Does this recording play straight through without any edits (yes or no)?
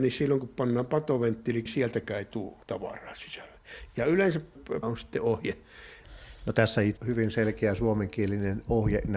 no